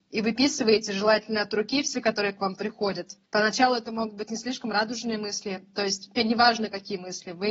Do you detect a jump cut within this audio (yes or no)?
yes